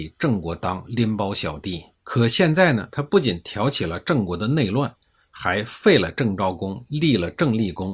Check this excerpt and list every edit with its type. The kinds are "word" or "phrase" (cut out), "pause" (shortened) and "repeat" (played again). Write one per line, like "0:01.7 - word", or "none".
0:01.9 - pause